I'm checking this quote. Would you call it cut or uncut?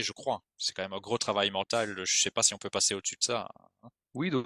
uncut